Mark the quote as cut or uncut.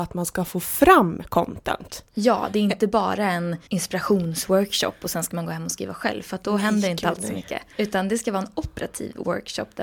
cut